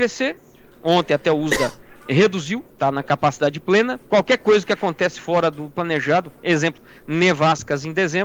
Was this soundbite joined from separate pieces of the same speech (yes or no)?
yes